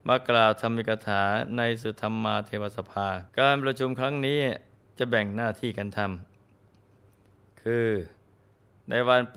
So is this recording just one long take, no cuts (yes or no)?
no